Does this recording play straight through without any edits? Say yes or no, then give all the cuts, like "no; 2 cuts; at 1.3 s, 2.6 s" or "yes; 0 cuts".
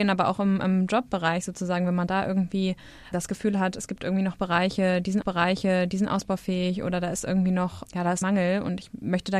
no; 4 cuts; at 3.1 s, 5.2 s, 7.9 s, 8.2 s